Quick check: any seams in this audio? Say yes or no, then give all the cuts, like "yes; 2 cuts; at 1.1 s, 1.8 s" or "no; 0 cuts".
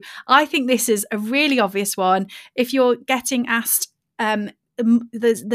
no; 0 cuts